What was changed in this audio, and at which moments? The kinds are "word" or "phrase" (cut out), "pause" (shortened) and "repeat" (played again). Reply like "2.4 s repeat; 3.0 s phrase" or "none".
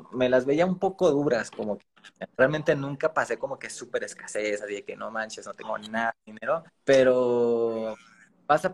2.3 s pause; 6.2 s pause; 6.7 s pause